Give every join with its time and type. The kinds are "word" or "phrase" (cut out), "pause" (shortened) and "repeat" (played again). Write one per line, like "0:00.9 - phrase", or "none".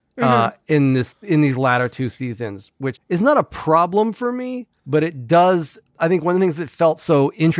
0:02.9 - word
0:04.8 - pause